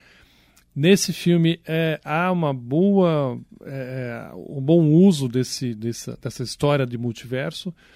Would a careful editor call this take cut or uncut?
uncut